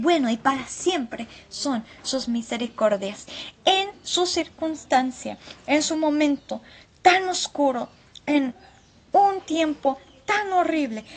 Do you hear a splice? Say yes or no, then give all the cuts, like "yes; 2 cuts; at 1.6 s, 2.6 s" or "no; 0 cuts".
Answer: no; 0 cuts